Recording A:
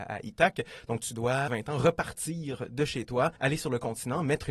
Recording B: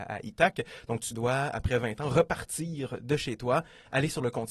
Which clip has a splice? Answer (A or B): A